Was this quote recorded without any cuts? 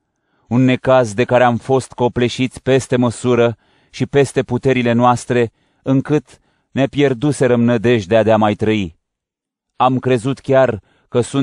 yes; 0 cuts

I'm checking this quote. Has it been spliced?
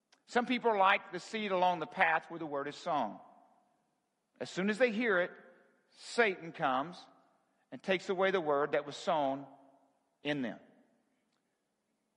no; 0 cuts

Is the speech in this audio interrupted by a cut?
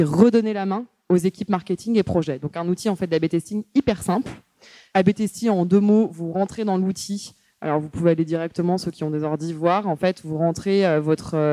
no; 0 cuts

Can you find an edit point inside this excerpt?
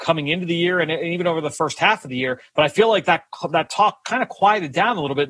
yes; 1 cut; at 2.5 s

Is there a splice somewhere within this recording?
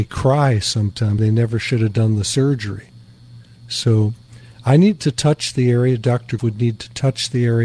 yes; 2 cuts; at 1.2 s, 6.4 s

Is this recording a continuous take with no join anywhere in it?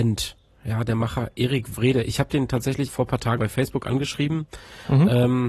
no; 2 cuts; at 2.9 s, 3.4 s

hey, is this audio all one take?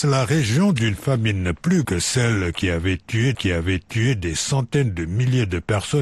no; 2 cuts; at 1.8 s, 3.3 s

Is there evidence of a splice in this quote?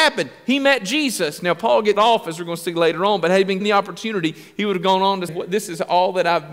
yes; 3 cuts; at 2.0 s, 3.6 s, 5.3 s

